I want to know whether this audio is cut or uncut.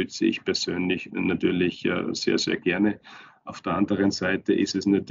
uncut